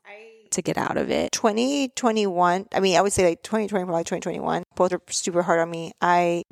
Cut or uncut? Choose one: cut